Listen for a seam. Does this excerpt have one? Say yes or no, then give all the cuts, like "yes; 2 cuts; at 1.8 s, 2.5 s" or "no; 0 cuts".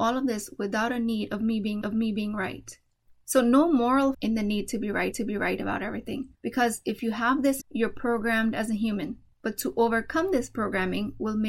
yes; 6 cuts; at 1.8 s, 4.1 s, 5.1 s, 6.3 s, 7.6 s, 9.3 s